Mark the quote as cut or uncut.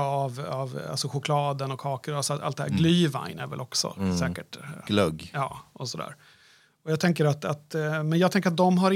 uncut